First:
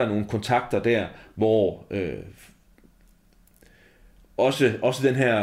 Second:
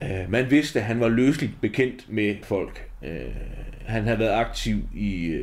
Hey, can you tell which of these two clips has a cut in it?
second; 1 cut; at 2.4 s

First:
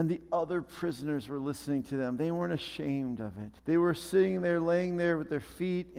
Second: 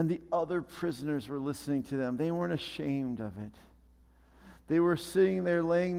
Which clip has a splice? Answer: first; 1 cut; at 3.6 s

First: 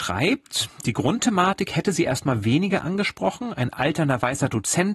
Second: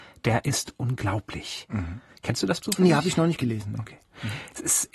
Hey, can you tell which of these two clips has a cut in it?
second; 1 cut; at 2.6 s

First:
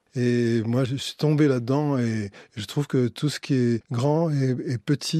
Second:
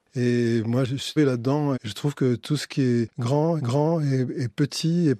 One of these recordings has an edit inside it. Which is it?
second; 3 cuts; at 1.2 s, 1.7 s, 3.6 s

